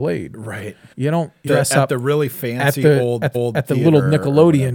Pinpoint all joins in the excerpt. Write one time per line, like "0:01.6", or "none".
0:00.9
0:01.5
0:03.3